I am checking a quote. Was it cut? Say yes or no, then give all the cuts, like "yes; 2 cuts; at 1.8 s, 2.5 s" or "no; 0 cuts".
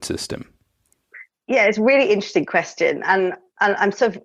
no; 0 cuts